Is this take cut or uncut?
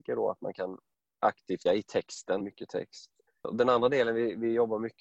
cut